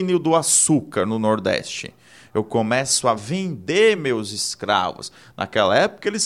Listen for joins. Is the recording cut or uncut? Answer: uncut